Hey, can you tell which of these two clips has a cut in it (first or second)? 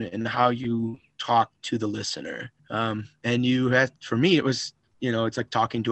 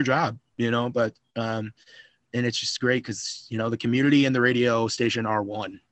first